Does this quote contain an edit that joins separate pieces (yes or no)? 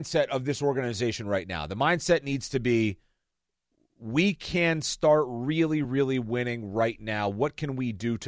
no